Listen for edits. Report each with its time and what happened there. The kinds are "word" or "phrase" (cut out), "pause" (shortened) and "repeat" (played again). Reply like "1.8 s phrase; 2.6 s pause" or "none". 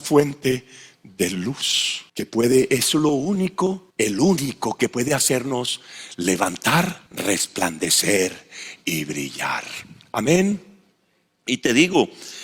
2.1 s pause; 3.9 s pause; 7.1 s pause